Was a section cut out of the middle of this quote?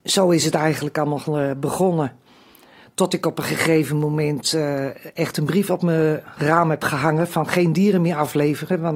no; 0 cuts

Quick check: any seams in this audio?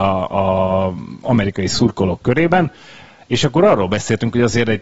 no; 0 cuts

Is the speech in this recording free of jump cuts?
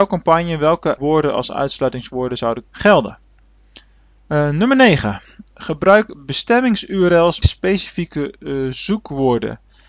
no; 3 cuts; at 1.0 s, 2.6 s, 7.4 s

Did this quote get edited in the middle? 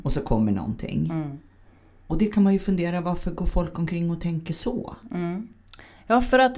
no; 0 cuts

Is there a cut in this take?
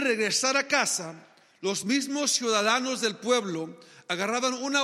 no; 0 cuts

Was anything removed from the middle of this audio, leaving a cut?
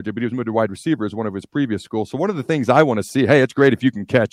no; 0 cuts

